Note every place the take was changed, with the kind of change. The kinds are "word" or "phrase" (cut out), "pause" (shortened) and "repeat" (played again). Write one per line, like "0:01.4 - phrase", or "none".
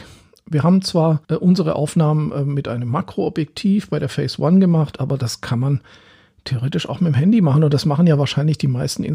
none